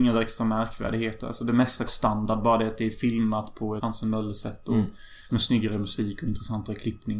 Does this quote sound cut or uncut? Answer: cut